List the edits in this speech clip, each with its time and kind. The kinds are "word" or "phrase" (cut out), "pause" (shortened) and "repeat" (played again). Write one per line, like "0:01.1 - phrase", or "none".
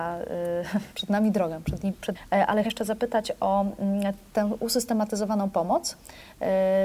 0:00.9 - word
0:02.1 - phrase
0:02.6 - word